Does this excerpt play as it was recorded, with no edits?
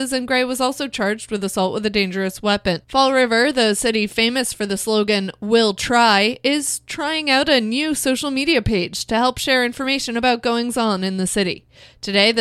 no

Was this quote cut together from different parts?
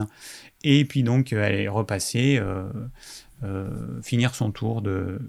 no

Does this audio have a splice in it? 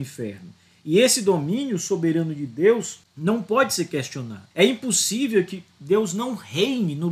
yes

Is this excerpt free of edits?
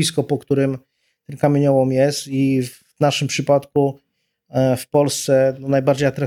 yes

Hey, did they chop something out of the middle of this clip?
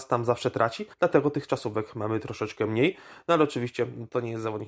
yes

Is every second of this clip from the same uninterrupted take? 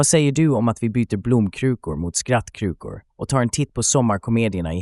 yes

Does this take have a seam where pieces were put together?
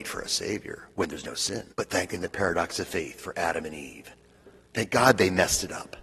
yes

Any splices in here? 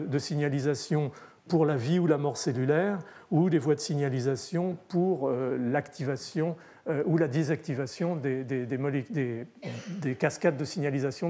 no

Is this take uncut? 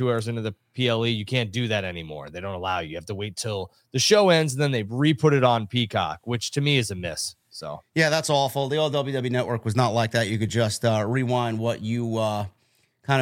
yes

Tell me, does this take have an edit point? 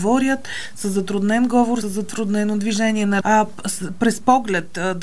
yes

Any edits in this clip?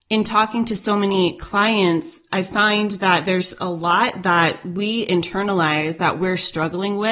no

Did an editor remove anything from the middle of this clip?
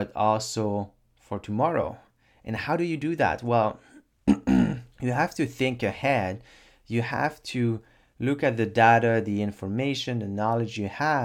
yes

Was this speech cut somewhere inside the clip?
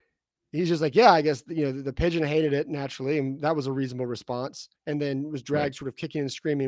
yes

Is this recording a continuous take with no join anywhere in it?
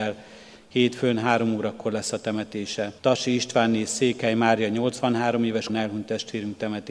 no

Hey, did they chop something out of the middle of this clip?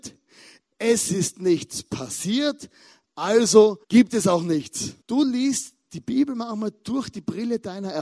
yes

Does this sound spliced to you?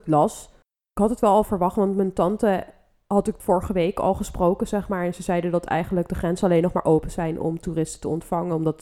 no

